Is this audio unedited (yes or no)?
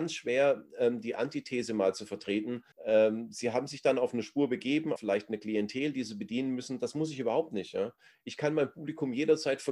no